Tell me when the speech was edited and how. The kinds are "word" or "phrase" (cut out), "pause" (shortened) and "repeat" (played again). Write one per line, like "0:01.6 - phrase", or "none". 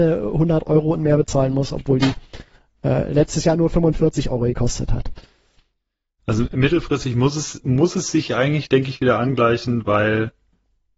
none